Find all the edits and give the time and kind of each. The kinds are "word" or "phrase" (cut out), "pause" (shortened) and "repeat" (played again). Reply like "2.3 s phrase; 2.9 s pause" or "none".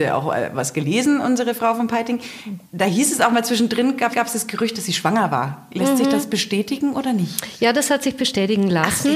2.7 s pause; 4.1 s repeat